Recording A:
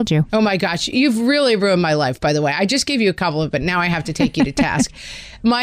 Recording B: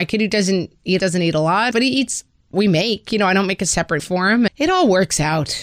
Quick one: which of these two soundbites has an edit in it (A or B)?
B